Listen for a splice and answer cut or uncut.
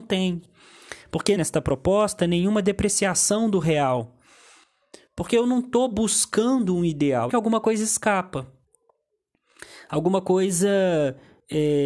cut